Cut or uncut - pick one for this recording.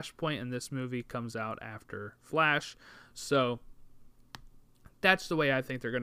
uncut